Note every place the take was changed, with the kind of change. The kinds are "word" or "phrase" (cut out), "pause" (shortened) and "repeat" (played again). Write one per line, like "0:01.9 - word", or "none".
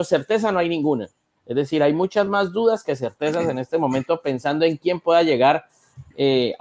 none